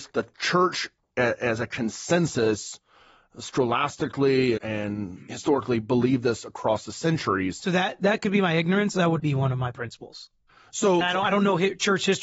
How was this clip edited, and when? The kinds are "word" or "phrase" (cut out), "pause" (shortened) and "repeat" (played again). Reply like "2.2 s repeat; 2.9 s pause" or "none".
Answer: 4.6 s word; 9.2 s word; 11.0 s word